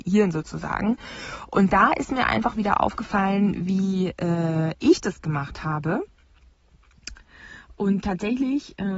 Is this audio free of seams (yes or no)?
yes